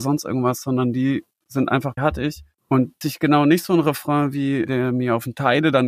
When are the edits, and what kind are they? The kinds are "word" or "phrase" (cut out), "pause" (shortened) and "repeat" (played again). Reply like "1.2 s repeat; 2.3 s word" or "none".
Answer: 2.0 s phrase; 3.0 s phrase